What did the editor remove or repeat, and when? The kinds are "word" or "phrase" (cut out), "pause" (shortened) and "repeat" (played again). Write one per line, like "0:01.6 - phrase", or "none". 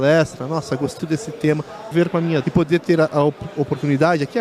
0:01.0 - word
0:01.9 - phrase
0:02.4 - word

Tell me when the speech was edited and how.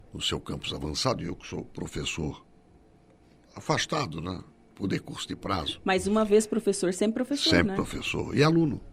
none

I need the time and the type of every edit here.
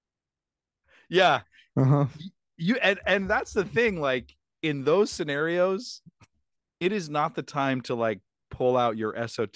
none

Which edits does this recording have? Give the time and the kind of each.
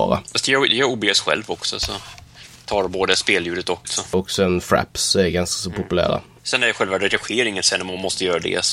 0:03.8 - word

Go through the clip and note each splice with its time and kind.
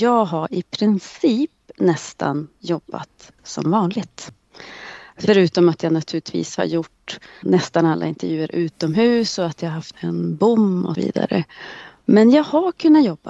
0:03.4 - word
0:07.4 - word
0:09.9 - word
0:10.9 - word

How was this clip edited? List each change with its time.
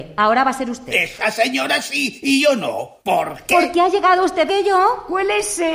0:03.0 - pause
0:04.5 - word

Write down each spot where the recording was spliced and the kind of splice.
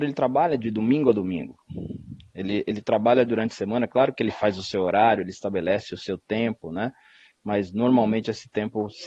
none

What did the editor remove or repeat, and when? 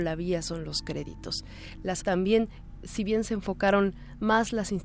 0:02.0 - word

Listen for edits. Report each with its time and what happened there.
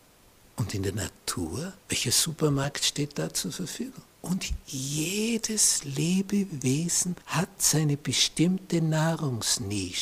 0:01.8 - pause
0:04.1 - pause
0:07.2 - pause

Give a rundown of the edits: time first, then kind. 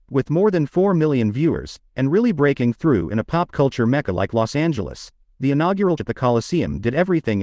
0:06.0 - word

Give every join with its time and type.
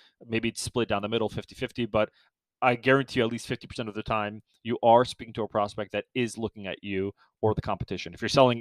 none

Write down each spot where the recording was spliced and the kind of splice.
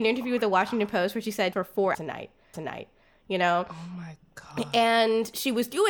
0:01.5 - phrase
0:01.9 - word
0:02.5 - repeat

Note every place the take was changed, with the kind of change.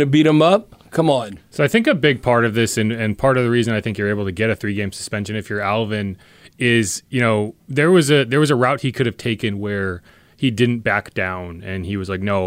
none

